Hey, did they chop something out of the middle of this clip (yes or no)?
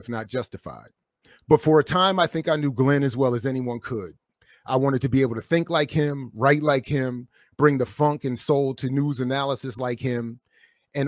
yes